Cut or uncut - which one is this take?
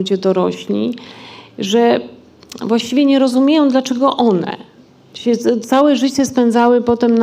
uncut